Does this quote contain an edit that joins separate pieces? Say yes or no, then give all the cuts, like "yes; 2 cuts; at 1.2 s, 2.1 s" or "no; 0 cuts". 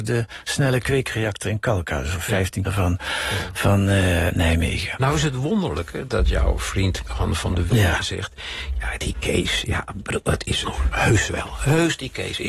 yes; 5 cuts; at 2.6 s, 4.3 s, 6.1 s, 7.7 s, 10.6 s